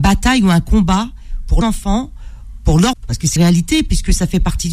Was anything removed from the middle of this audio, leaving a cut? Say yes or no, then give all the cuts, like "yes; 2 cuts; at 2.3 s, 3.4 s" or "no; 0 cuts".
yes; 3 cuts; at 1.6 s, 2.9 s, 3.4 s